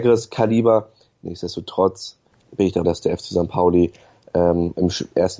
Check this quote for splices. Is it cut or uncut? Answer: cut